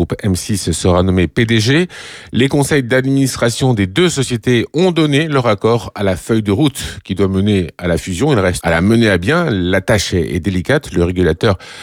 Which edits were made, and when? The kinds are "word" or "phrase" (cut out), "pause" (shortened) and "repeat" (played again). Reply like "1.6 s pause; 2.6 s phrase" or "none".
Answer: 8.6 s word